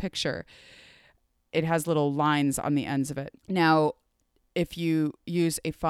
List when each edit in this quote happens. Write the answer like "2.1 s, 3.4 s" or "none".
3.4 s